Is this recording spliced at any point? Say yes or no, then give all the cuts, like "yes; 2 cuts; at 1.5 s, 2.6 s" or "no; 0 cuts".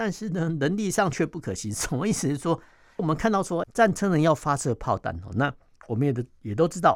yes; 2 cuts; at 3.0 s, 3.6 s